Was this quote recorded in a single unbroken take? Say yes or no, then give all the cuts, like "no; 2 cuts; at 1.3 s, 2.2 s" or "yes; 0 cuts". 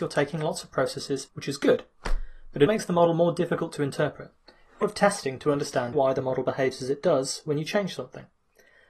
no; 4 cuts; at 1.3 s, 2.7 s, 4.8 s, 5.9 s